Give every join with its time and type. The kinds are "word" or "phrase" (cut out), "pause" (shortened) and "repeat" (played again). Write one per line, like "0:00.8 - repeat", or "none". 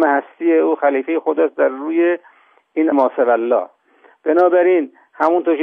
0:02.9 - word

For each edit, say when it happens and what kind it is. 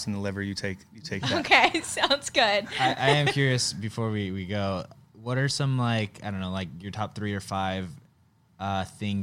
none

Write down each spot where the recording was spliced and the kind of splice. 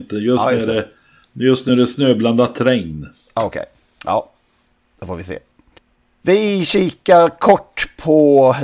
none

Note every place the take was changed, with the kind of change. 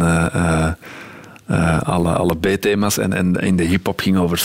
none

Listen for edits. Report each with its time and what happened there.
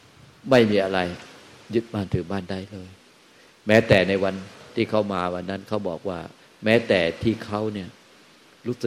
none

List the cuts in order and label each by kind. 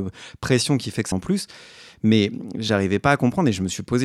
0:01.1 - word

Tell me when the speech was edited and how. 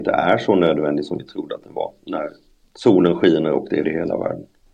0:03.8 - word

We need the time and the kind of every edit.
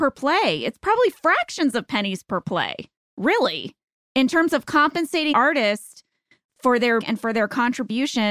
0:03.0 - pause
0:05.3 - word
0:07.0 - word

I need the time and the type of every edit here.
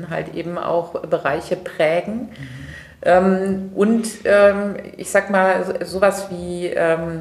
none

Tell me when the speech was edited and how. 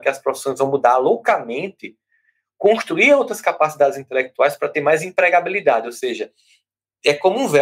none

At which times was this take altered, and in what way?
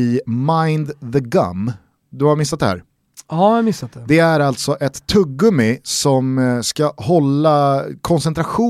none

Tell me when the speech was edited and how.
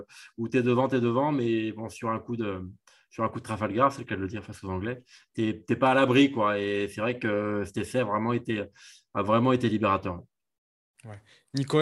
none

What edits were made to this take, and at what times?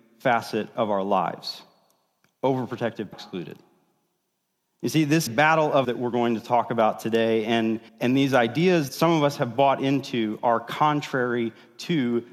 0:03.1 - phrase
0:05.3 - phrase
0:05.8 - word
0:07.9 - pause
0:08.9 - word

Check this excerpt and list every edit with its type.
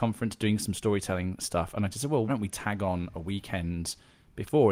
0:02.3 - word

